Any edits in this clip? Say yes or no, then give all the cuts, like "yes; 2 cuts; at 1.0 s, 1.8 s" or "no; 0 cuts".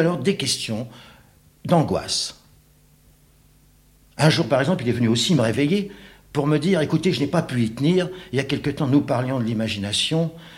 no; 0 cuts